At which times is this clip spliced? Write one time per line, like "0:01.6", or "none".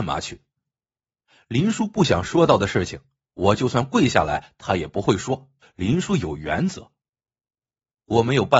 0:05.6